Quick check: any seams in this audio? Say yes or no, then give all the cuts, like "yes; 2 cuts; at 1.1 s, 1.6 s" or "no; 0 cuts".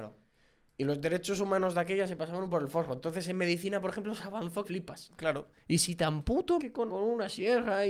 yes; 4 cuts; at 2.5 s, 4.6 s, 6.6 s, 6.9 s